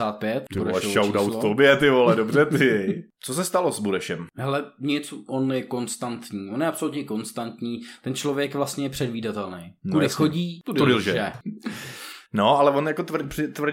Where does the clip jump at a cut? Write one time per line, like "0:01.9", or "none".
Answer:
0:09.8